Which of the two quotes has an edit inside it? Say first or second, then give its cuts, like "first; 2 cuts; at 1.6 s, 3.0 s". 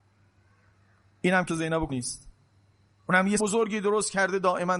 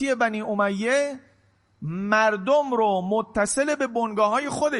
first; 3 cuts; at 1.5 s, 1.9 s, 3.4 s